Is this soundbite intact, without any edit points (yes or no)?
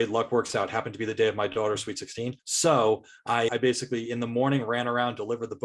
no